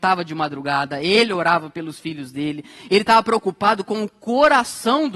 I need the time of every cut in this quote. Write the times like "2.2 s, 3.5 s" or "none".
none

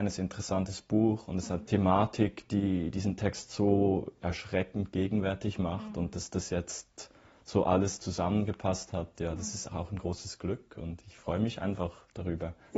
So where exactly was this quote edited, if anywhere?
1.7 s, 4.2 s, 9.7 s

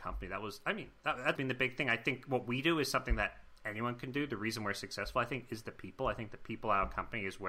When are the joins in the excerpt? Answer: 1.3 s

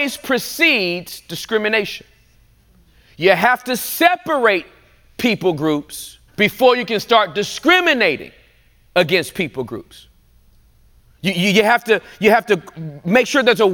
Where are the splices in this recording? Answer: 6.3 s

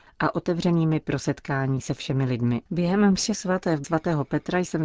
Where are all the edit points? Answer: 2.7 s, 3.8 s

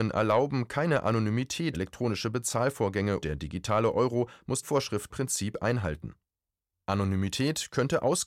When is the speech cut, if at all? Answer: 1.7 s, 3.2 s, 4.6 s, 5.1 s

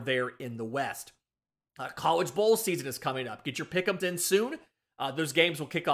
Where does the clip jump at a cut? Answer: 4.0 s

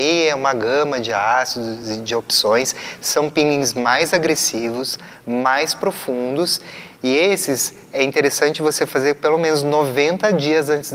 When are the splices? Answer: none

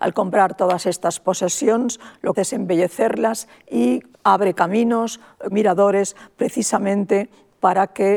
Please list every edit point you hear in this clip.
2.3 s, 4.1 s, 5.5 s

